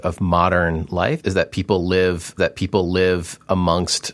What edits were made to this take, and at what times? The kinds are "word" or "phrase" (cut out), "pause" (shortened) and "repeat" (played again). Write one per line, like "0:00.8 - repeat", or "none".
0:01.2 - word
0:02.4 - repeat